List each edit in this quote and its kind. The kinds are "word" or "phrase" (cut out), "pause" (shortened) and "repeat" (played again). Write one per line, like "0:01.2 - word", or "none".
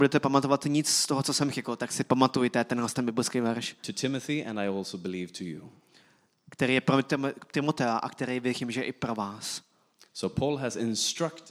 none